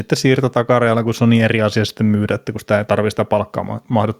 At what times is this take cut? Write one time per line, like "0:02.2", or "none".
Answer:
none

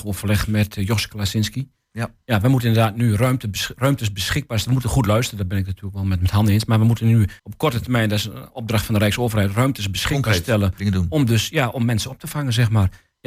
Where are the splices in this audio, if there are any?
0:07.4

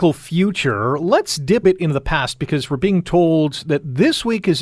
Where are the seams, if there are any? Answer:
0:01.6

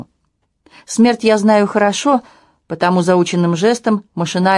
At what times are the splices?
none

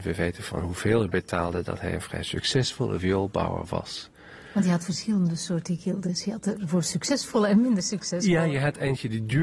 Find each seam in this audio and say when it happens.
none

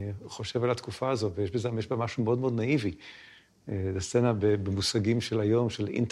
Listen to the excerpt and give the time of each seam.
none

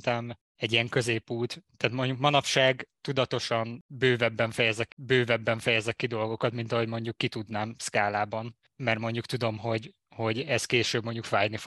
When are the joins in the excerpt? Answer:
0:04.9

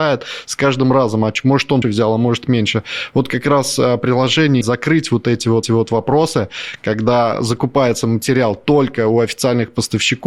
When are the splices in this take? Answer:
0:01.8
0:04.6
0:05.6

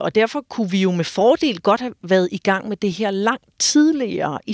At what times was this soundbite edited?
none

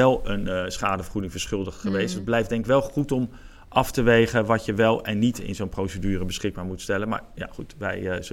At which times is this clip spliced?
none

